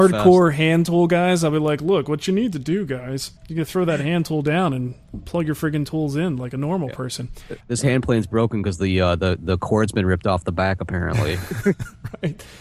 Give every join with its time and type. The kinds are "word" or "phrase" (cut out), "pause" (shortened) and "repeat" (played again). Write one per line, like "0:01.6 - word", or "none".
0:03.4 - pause
0:07.6 - pause